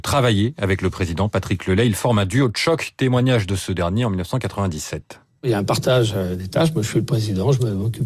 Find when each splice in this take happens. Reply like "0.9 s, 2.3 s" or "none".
none